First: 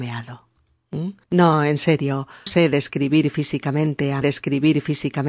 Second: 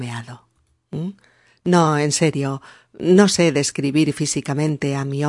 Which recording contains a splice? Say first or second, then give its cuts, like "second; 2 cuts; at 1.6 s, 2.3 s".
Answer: first; 3 cuts; at 1.2 s, 2.5 s, 4.2 s